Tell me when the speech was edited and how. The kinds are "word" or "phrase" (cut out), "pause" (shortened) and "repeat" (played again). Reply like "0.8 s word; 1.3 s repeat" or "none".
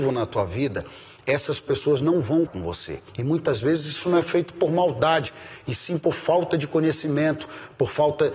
2.5 s word; 3.1 s pause